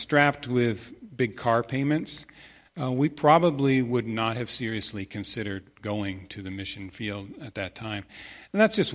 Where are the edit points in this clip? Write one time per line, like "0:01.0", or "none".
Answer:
none